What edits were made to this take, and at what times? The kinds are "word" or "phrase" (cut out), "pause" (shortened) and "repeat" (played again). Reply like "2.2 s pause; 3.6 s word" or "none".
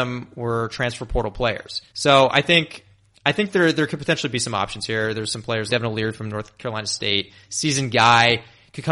1.9 s pause; 5.7 s word

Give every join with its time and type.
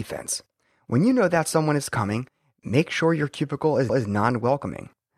3.9 s repeat

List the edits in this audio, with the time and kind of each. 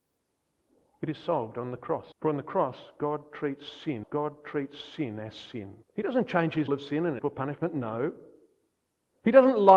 2.1 s pause; 4.0 s repeat; 5.8 s pause; 6.7 s phrase; 7.2 s phrase

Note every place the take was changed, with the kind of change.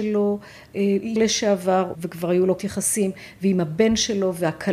1.2 s word; 1.9 s word; 2.6 s phrase

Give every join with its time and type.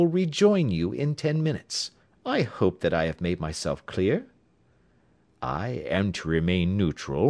2.0 s pause

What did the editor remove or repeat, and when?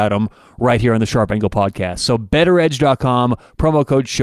none

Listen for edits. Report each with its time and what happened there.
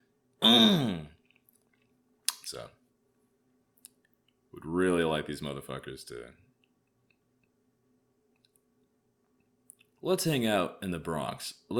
none

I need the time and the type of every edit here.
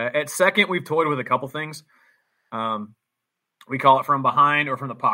none

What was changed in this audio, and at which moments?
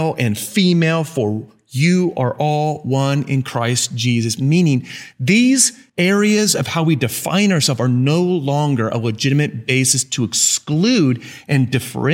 5.9 s pause

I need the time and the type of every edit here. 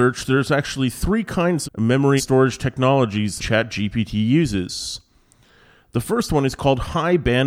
1.6 s word; 2.2 s word; 3.4 s word

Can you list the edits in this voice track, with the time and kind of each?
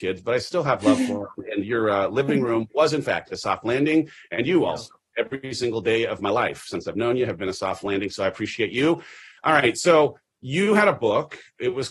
none

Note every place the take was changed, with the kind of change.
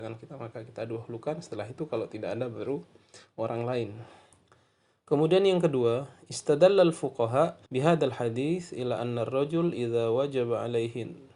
4.3 s pause; 7.7 s pause

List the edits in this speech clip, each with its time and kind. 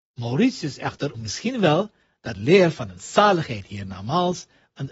1.1 s word; 2.4 s phrase

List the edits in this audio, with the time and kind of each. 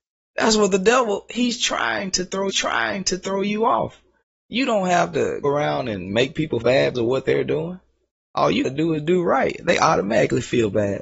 2.5 s repeat; 4.2 s pause; 5.4 s word; 6.6 s word; 6.9 s word; 8.1 s pause; 8.6 s word

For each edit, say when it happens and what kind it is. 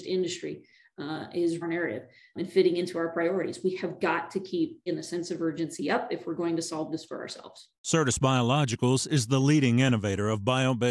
1.6 s phrase; 2.4 s word; 4.9 s phrase; 7.8 s pause

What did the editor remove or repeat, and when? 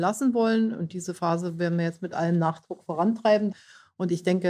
none

